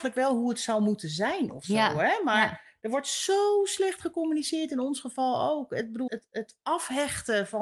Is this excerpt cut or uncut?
cut